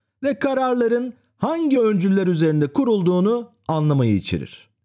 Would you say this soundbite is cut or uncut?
uncut